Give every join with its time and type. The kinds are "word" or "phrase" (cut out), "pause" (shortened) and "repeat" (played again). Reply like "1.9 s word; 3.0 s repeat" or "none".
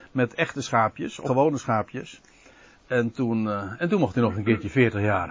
1.2 s word